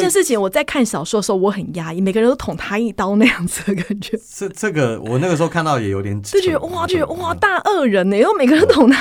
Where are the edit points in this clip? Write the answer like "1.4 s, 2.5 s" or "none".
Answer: 6.9 s